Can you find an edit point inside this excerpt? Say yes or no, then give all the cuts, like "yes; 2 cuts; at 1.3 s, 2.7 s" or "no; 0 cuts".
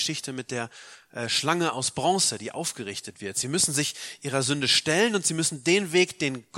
no; 0 cuts